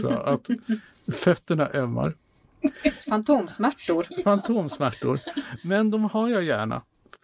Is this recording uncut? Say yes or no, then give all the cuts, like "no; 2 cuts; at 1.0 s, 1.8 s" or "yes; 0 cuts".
yes; 0 cuts